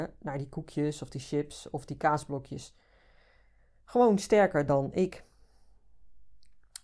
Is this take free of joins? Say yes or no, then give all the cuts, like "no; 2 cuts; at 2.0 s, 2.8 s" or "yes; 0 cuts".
yes; 0 cuts